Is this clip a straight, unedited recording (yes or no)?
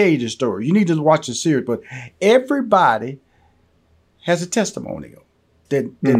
yes